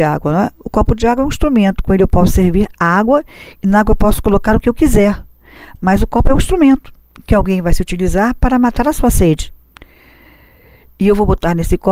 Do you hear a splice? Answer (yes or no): yes